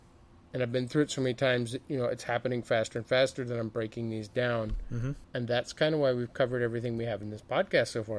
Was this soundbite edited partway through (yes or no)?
yes